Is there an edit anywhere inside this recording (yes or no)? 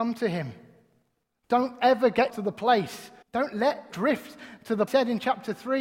yes